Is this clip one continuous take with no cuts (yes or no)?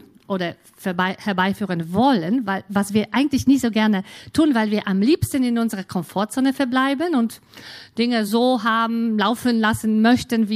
yes